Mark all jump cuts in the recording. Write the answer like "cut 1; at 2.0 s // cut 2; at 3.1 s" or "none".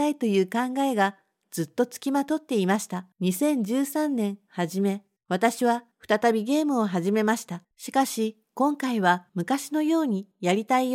cut 1; at 3.1 s // cut 2; at 5.2 s // cut 3; at 7.6 s